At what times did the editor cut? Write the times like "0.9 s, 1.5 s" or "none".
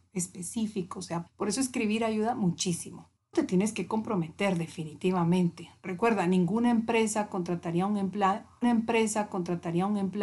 1.3 s, 3.3 s, 8.6 s